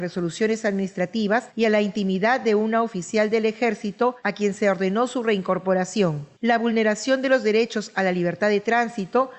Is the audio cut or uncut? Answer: uncut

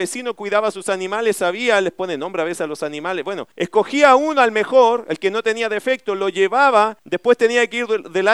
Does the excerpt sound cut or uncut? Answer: cut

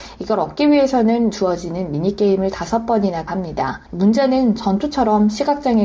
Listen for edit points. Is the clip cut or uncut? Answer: cut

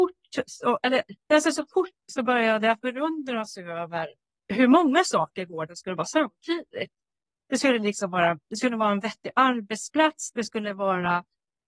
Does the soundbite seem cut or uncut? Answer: cut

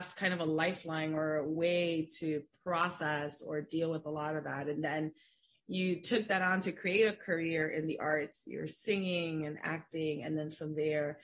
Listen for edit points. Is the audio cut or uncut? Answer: uncut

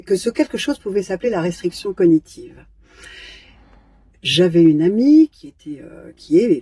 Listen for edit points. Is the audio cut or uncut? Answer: uncut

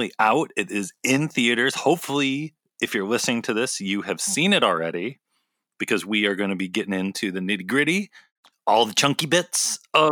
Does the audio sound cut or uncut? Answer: uncut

